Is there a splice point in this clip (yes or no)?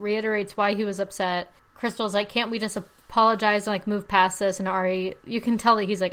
yes